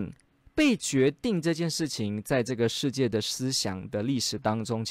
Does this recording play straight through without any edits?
yes; 0 cuts

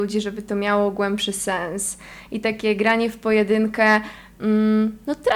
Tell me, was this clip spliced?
no; 0 cuts

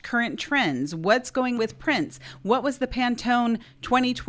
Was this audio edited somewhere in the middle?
yes; 1 cut; at 1.6 s

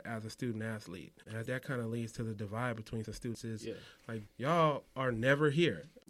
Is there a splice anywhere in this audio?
yes; 4 cuts; at 1.5 s, 3.0 s, 3.3 s, 4.3 s

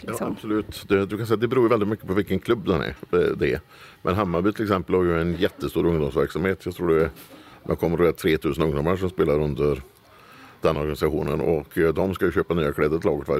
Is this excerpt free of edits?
yes; 0 cuts

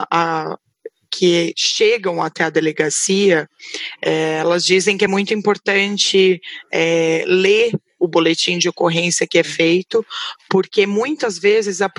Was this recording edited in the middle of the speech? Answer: no; 0 cuts

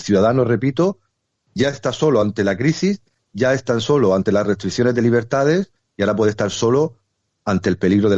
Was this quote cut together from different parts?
no; 0 cuts

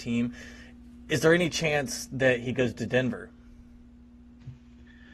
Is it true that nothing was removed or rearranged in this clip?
yes; 0 cuts

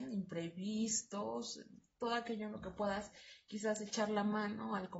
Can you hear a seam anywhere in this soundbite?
no; 0 cuts

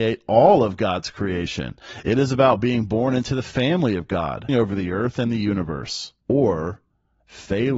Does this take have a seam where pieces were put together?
yes; 2 cuts; at 4.5 s, 6.2 s

